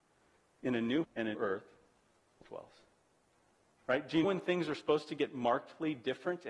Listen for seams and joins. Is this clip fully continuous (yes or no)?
no